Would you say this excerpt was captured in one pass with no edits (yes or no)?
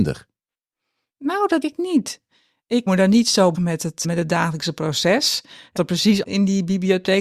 no